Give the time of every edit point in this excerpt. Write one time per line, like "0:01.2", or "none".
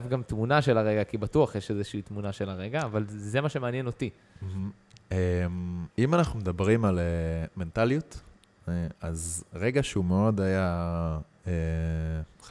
0:05.9
0:09.0